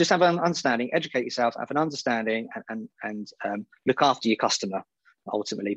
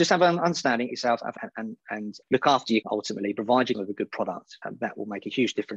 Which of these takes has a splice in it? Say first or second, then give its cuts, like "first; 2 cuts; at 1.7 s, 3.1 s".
second; 6 cuts; at 0.9 s, 1.4 s, 2.2 s, 2.8 s, 3.7 s, 4.6 s